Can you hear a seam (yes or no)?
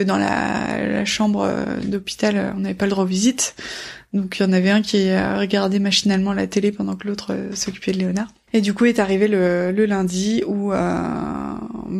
no